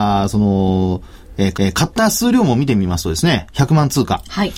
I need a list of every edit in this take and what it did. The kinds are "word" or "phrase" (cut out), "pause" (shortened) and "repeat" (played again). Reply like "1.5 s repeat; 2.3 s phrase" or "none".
1.5 s repeat